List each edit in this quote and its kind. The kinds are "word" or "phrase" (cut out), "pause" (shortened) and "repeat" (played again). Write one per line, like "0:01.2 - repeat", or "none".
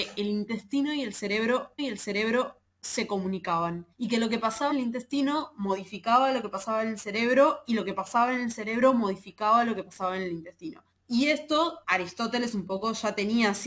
0:01.8 - repeat
0:03.9 - pause
0:04.7 - word
0:10.9 - pause
0:11.8 - word

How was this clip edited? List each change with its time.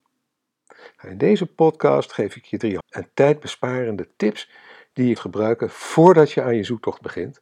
0:02.8 - word
0:05.2 - word

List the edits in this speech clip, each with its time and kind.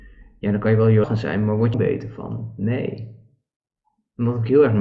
0:01.0 - word
0:01.7 - phrase

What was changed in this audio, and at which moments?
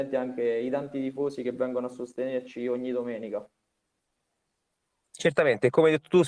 none

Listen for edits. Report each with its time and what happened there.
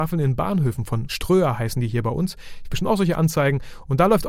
0:01.1 - word
0:02.6 - phrase

